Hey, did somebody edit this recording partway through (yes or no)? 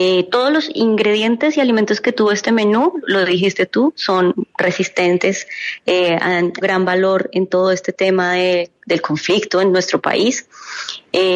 yes